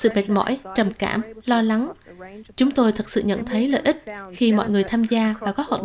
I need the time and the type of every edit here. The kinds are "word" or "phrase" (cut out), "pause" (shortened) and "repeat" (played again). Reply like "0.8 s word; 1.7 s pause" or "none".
none